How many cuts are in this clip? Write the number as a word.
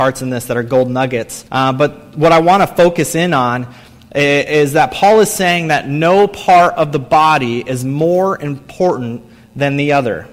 one